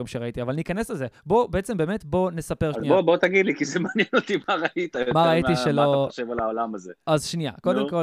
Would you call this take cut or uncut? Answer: uncut